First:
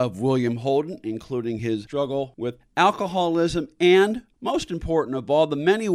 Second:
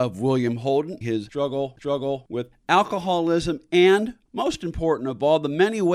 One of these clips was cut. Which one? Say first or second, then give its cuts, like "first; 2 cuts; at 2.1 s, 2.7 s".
second; 2 cuts; at 1.0 s, 1.8 s